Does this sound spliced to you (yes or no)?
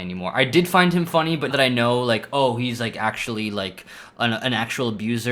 yes